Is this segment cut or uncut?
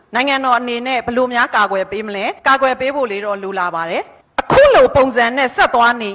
cut